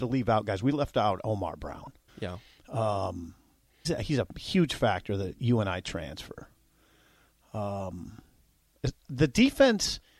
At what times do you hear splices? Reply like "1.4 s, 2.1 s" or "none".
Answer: 2.1 s, 3.8 s